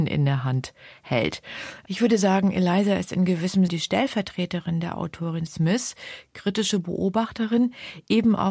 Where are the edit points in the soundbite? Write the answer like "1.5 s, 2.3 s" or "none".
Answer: 3.7 s, 5.5 s